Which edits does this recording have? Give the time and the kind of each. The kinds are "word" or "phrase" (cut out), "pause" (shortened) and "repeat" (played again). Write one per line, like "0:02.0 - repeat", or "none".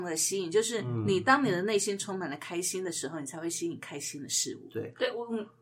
none